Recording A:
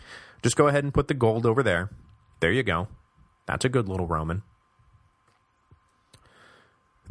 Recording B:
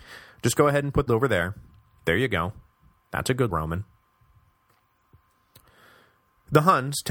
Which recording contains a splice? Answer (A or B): B